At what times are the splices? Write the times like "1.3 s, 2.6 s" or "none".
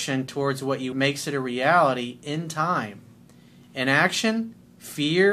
0.9 s